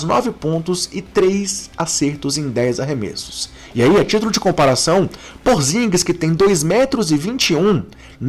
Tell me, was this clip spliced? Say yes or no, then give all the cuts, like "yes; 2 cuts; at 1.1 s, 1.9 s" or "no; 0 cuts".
no; 0 cuts